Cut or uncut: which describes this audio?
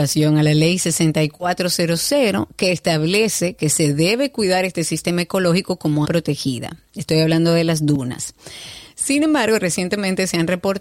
cut